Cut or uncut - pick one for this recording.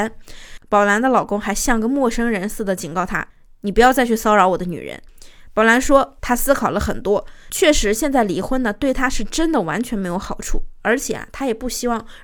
cut